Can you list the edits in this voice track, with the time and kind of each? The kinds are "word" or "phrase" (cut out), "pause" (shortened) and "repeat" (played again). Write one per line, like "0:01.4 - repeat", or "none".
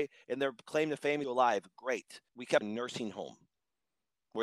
0:01.2 - phrase
0:02.3 - pause
0:02.6 - phrase